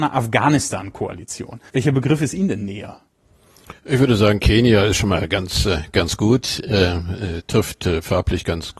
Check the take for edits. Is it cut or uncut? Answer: cut